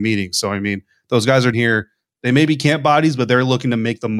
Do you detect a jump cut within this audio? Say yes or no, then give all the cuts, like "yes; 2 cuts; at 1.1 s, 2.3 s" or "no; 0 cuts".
yes; 1 cut; at 1.5 s